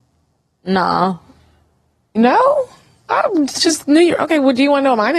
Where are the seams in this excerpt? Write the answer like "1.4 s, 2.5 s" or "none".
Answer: none